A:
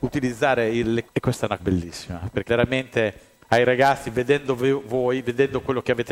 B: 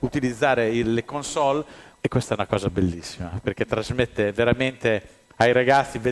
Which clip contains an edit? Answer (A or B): A